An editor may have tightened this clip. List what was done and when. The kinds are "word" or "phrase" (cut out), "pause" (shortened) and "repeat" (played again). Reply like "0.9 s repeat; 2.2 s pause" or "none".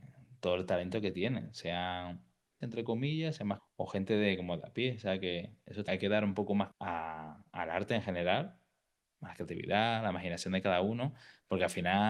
2.6 s word; 3.6 s word; 5.9 s word; 6.7 s word